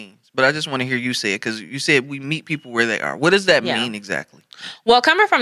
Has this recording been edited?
no; 0 cuts

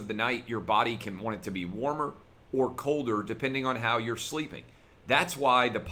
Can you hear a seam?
no; 0 cuts

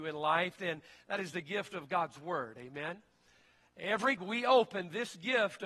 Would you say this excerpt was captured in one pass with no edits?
no; 1 cut; at 4.2 s

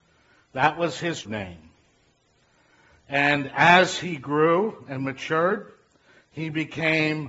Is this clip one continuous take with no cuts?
no; 1 cut; at 1.2 s

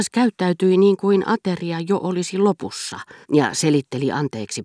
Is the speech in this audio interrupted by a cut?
yes; 1 cut; at 3.2 s

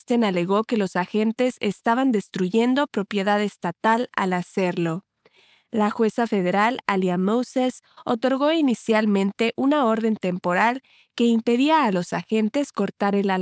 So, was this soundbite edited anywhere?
no; 0 cuts

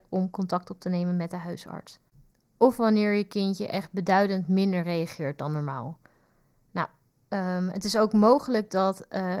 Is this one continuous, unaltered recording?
yes; 0 cuts

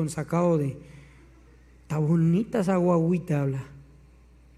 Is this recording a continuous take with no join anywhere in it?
yes; 0 cuts

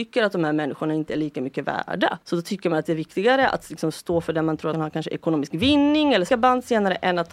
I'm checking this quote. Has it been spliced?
yes; 3 cuts; at 2.2 s, 4.7 s, 6.3 s

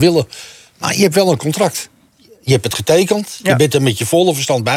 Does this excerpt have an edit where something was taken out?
no; 0 cuts

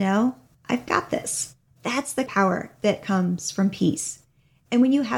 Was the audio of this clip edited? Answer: yes; 2 cuts; at 1.7 s, 2.3 s

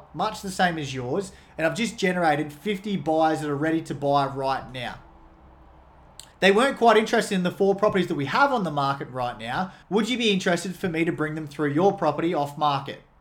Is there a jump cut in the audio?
yes; 2 cuts; at 6.3 s, 9.8 s

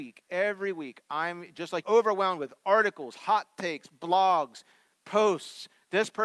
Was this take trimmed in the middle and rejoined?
yes; 2 cuts; at 1.0 s, 1.8 s

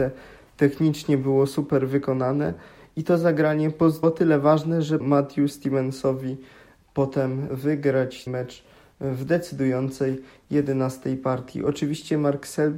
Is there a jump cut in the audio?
yes; 4 cuts; at 4.0 s, 5.0 s, 7.5 s, 8.3 s

